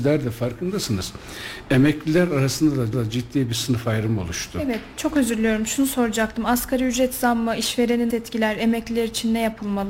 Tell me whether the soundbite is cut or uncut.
cut